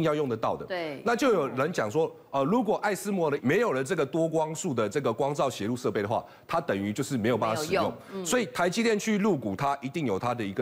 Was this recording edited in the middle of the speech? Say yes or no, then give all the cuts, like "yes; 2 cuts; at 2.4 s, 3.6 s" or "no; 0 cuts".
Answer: yes; 1 cut; at 3.4 s